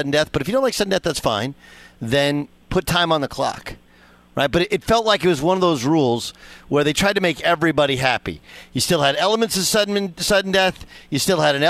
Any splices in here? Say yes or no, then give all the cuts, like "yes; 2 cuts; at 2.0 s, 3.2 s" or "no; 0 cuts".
no; 0 cuts